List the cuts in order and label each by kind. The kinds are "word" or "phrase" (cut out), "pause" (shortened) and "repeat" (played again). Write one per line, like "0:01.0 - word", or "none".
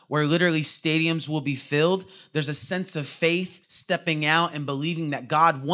0:03.6 - pause